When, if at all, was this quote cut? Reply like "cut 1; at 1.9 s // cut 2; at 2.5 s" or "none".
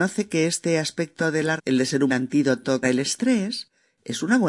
cut 1; at 1.6 s // cut 2; at 2.1 s // cut 3; at 2.8 s